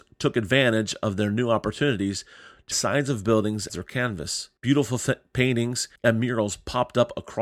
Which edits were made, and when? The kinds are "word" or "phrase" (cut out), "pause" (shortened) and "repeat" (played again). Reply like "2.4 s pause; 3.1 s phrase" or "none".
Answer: 2.7 s phrase; 3.7 s word; 4.6 s pause; 6.0 s pause